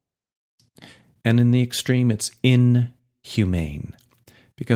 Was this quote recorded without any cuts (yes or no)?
yes